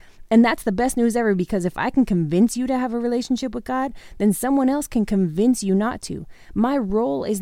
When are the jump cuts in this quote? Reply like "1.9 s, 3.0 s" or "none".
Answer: none

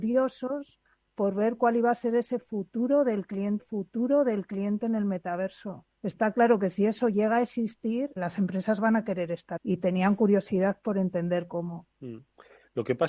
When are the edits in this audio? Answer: 3.6 s, 5.9 s, 8.2 s, 9.6 s, 11.9 s

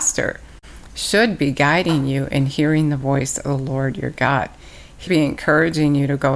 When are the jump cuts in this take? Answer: 5.1 s

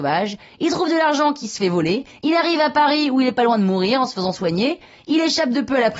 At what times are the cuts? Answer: none

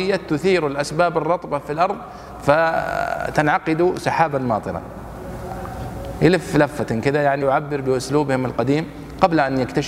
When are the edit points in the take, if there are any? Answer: 7.4 s

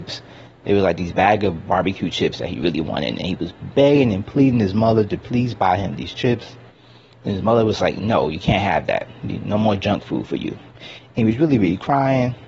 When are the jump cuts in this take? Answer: none

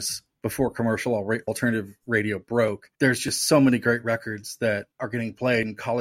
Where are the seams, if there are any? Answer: 1.5 s, 2.9 s, 4.9 s

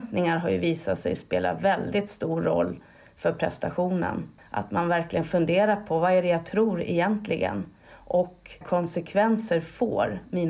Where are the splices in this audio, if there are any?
8.6 s

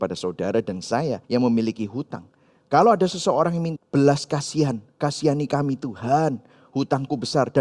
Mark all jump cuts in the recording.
1.2 s, 3.8 s, 4.9 s

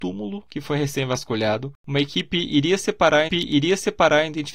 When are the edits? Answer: 3.3 s

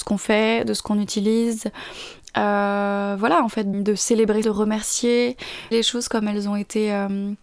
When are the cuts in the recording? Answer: 3.7 s, 4.4 s, 5.7 s

